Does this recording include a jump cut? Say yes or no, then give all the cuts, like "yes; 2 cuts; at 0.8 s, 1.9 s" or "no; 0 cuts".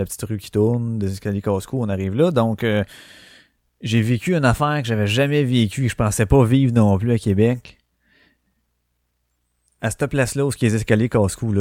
no; 0 cuts